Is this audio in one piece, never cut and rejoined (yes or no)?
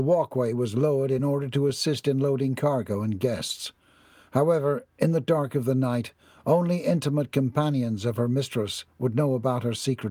yes